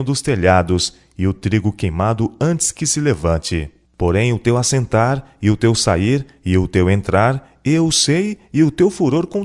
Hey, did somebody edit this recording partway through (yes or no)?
no